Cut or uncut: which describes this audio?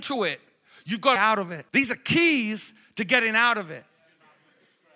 cut